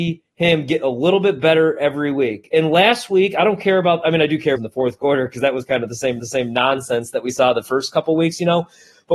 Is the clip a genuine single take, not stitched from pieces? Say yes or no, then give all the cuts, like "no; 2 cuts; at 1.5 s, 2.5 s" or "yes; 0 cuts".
no; 2 cuts; at 4.6 s, 6.2 s